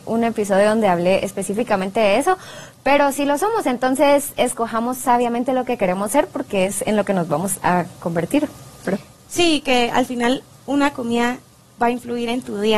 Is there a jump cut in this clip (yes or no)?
no